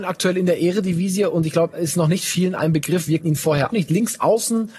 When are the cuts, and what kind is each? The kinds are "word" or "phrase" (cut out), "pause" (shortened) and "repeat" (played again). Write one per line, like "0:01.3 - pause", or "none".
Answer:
0:01.7 - word
0:03.2 - word
0:03.7 - word